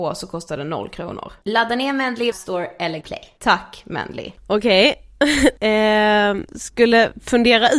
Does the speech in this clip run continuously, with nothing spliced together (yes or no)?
no